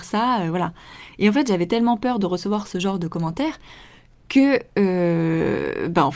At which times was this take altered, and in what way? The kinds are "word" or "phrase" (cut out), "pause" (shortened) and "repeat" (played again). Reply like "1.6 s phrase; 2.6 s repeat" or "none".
none